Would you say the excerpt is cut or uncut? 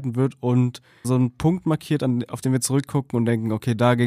cut